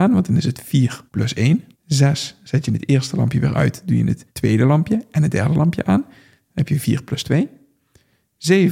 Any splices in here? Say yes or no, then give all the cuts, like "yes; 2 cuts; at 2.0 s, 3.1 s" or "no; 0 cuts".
yes; 3 cuts; at 1.1 s, 1.7 s, 4.3 s